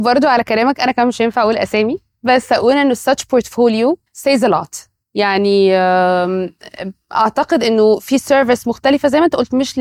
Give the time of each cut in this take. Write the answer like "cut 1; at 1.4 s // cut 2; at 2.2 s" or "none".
cut 1; at 4.1 s // cut 2; at 5.0 s